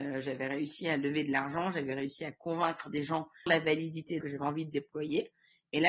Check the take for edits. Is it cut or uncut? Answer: cut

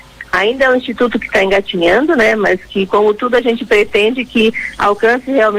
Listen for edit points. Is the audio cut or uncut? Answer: cut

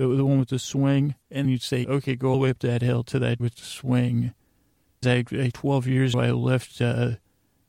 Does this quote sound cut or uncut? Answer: cut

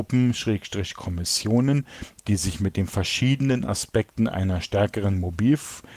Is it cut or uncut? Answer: uncut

